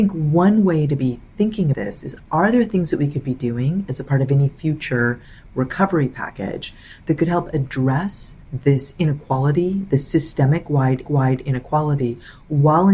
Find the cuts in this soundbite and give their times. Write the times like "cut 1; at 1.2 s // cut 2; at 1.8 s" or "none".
cut 1; at 1.7 s // cut 2; at 8.4 s // cut 3; at 11.0 s